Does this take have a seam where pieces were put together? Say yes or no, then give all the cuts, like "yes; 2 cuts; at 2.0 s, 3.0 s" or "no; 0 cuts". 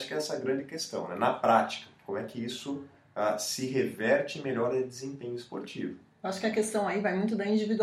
no; 0 cuts